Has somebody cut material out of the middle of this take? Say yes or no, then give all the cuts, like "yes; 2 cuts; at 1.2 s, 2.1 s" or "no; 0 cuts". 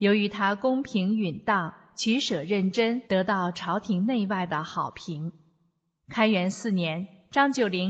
yes; 1 cut; at 3.1 s